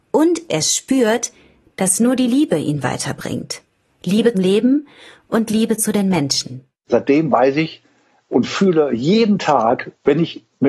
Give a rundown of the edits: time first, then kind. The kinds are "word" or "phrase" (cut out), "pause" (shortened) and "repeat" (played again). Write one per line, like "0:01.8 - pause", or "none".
0:04.3 - word